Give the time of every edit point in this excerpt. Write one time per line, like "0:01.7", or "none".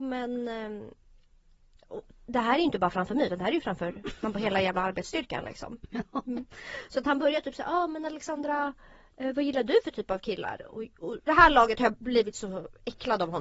0:11.3